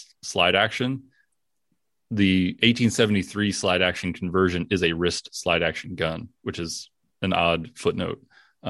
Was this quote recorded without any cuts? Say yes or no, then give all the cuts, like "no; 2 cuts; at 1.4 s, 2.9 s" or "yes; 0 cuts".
yes; 0 cuts